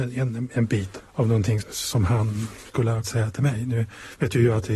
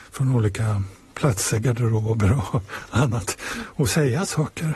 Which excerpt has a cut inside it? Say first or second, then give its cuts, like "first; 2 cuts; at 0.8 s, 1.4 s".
first; 3 cuts; at 1.0 s, 1.6 s, 3.0 s